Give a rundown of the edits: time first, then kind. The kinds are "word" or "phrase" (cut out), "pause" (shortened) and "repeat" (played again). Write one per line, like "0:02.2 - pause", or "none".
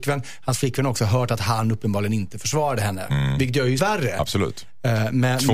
0:03.8 - word